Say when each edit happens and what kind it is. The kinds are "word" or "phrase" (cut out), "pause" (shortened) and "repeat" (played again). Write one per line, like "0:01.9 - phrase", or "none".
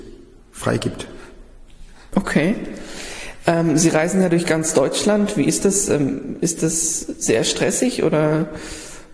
none